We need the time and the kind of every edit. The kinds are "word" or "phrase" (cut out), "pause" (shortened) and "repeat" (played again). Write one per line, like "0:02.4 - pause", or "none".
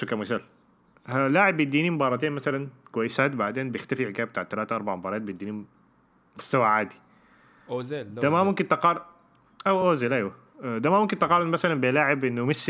none